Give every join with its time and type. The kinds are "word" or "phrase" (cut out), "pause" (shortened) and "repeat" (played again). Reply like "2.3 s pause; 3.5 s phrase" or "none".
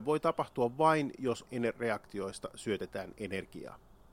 1.5 s word